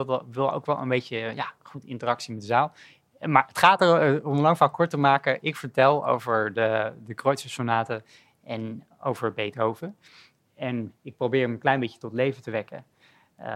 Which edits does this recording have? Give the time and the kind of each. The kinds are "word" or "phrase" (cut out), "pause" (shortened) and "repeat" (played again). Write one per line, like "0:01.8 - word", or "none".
none